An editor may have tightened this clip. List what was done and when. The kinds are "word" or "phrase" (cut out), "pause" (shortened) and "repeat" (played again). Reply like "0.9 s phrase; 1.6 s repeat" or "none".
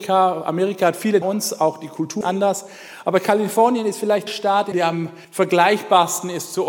1.2 s phrase; 2.2 s word; 4.3 s word; 4.7 s word; 5.2 s pause